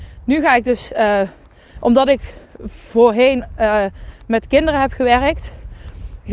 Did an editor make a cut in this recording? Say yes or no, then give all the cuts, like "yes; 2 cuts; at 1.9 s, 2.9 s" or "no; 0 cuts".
no; 0 cuts